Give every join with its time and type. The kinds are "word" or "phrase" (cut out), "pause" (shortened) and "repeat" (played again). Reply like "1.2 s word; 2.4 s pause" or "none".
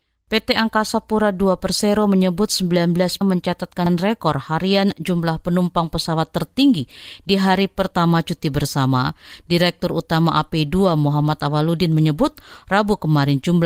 3.2 s phrase